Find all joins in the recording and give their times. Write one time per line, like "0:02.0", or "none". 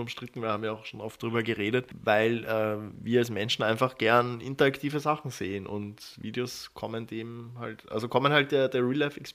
none